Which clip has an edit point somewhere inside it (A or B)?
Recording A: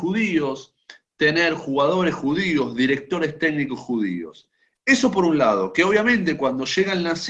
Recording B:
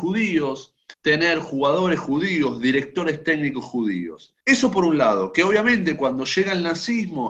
B